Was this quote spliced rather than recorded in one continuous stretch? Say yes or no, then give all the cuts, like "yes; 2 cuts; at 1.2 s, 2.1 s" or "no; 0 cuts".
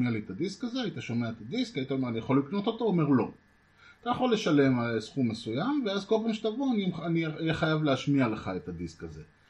no; 0 cuts